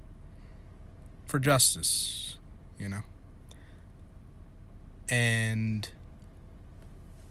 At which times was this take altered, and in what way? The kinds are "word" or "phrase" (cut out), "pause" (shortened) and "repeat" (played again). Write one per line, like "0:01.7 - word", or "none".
0:01.3 - word